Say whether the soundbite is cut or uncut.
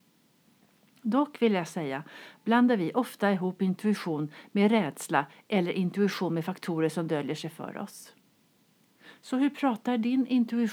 uncut